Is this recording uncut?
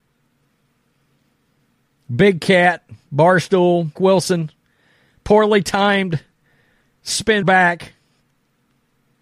no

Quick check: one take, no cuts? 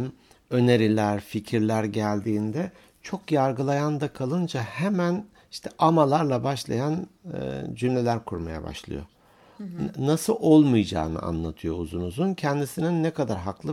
yes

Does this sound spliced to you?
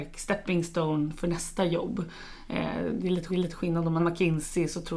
yes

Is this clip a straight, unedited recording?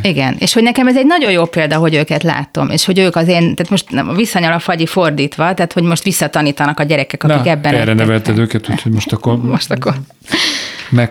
yes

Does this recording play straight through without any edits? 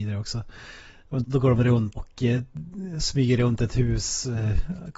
no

